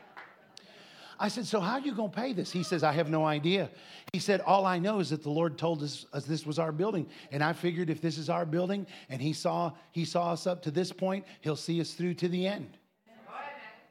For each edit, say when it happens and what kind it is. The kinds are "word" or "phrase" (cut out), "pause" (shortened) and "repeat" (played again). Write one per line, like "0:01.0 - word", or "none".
none